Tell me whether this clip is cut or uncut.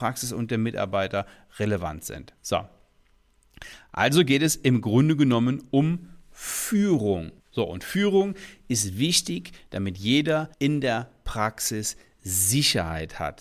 cut